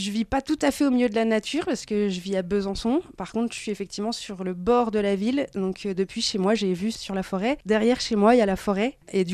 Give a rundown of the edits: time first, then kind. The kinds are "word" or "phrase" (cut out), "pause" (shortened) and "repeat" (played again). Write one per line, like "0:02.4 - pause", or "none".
none